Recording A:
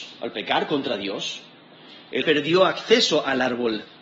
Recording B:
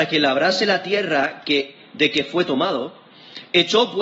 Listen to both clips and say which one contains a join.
A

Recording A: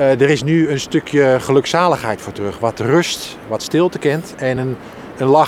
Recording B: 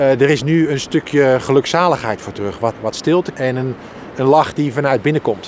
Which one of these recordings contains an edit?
B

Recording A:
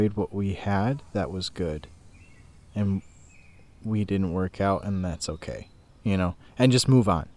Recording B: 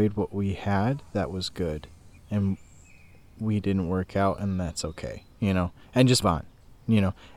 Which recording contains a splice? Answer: B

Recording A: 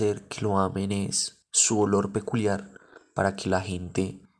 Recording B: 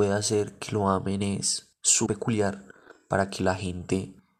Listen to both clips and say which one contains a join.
B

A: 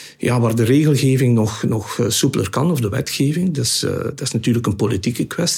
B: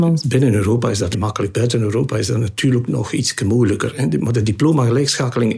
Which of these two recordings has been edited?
B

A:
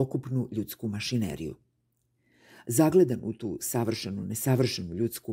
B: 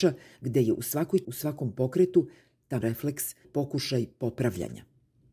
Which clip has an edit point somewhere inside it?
B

